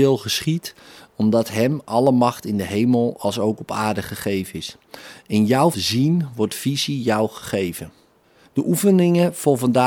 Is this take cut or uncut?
cut